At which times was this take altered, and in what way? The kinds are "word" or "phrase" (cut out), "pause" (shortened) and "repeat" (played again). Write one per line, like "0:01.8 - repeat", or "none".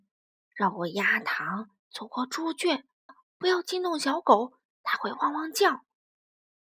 0:01.8 - pause
0:03.1 - word